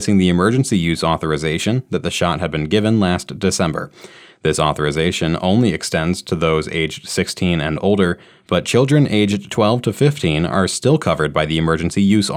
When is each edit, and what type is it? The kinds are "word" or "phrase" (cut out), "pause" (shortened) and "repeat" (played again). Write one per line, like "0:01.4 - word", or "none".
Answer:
none